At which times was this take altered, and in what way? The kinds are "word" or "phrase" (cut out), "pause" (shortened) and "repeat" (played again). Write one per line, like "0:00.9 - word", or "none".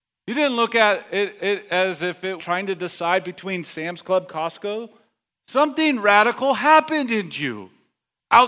0:01.4 - repeat
0:02.4 - phrase
0:05.3 - pause